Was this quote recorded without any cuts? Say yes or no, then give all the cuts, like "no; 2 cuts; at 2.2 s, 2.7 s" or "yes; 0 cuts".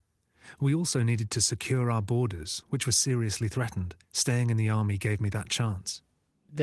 no; 1 cut; at 4.0 s